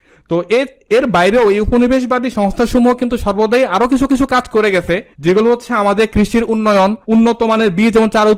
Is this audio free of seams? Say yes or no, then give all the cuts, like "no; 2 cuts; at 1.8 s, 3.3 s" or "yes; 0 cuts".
no; 3 cuts; at 4.1 s, 5.1 s, 7.0 s